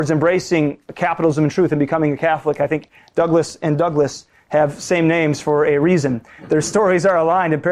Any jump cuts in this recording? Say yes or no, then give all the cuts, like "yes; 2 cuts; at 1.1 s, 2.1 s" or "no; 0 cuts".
no; 0 cuts